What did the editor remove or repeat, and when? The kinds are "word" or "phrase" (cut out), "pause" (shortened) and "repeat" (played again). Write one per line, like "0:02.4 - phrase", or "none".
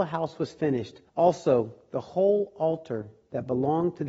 0:01.1 - pause